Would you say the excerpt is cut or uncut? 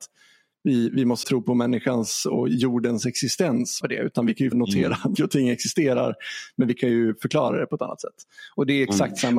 cut